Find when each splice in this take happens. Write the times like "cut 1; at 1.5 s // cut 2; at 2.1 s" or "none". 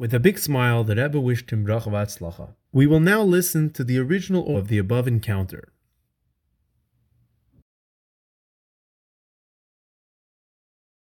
cut 1; at 2.6 s // cut 2; at 4.5 s